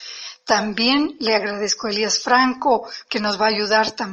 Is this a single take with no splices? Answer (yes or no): yes